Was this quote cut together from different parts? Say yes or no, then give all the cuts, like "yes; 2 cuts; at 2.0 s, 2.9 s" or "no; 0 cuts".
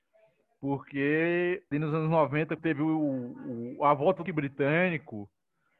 yes; 3 cuts; at 1.7 s, 2.6 s, 4.3 s